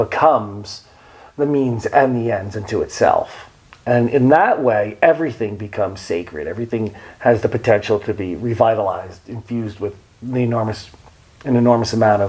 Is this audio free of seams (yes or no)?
yes